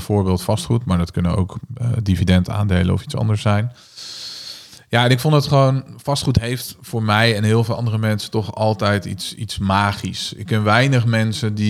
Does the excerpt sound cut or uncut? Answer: uncut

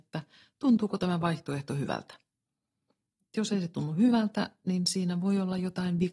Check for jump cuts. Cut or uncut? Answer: uncut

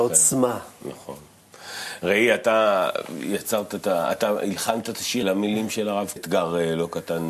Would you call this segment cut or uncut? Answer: cut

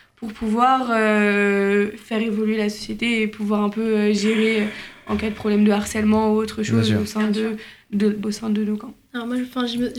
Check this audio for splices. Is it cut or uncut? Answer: cut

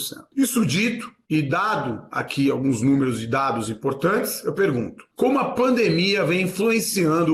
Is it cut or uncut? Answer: uncut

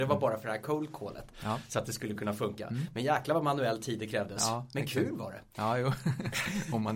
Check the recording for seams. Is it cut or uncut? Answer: uncut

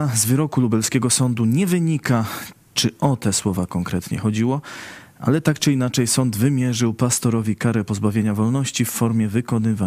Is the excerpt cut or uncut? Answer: uncut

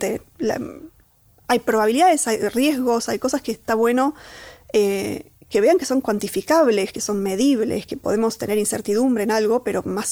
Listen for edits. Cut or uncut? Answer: uncut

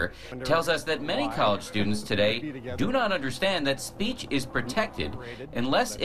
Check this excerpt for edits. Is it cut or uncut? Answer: uncut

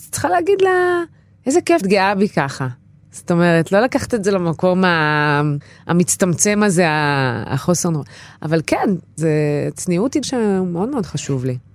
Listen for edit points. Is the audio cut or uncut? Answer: cut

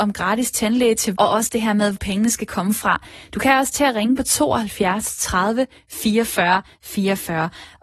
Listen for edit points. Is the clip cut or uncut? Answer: cut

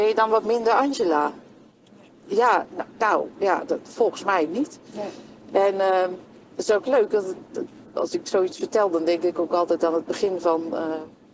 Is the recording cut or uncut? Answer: uncut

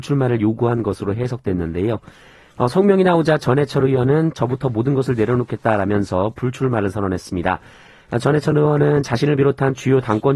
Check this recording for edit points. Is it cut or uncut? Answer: uncut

